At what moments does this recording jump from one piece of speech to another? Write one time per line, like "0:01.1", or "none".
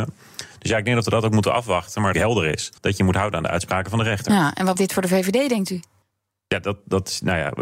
0:02.1
0:02.8
0:04.8
0:06.0